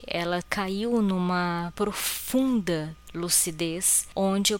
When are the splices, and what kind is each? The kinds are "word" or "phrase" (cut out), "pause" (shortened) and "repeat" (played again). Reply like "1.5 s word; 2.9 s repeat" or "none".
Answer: none